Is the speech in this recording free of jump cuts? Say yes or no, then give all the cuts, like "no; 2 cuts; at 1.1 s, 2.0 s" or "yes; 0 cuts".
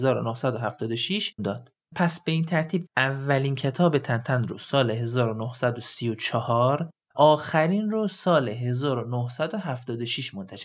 no; 3 cuts; at 1.4 s, 2.9 s, 7.1 s